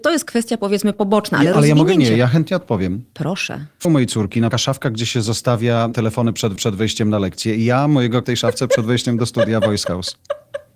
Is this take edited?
yes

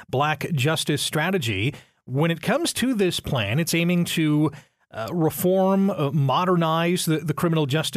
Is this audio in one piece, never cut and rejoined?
yes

